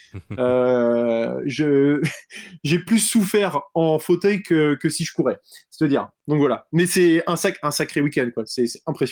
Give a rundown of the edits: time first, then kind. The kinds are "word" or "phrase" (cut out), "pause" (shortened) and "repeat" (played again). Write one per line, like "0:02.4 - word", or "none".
none